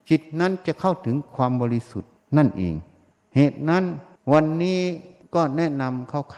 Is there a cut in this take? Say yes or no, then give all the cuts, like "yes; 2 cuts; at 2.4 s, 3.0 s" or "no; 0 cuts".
yes; 1 cut; at 3.1 s